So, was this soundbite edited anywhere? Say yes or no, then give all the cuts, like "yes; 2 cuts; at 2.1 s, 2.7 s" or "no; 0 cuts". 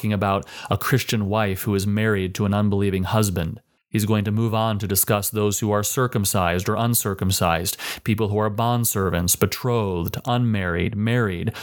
yes; 1 cut; at 3.8 s